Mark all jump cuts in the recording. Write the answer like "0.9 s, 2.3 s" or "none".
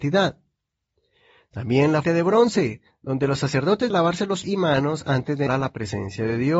2.0 s, 3.9 s, 4.4 s, 5.5 s